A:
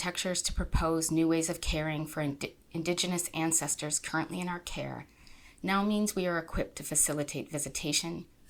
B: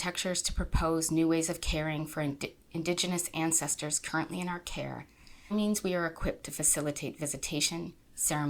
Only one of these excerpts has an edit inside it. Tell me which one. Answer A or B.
B